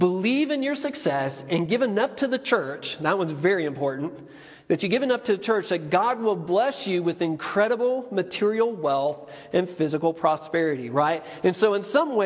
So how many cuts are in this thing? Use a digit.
0